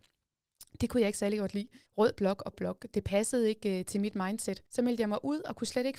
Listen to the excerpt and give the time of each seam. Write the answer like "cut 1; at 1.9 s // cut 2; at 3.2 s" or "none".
cut 1; at 1.9 s // cut 2; at 2.5 s // cut 3; at 4.7 s

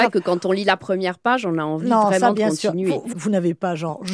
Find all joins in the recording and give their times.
cut 1; at 3.1 s

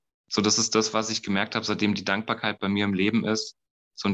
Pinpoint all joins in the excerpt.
none

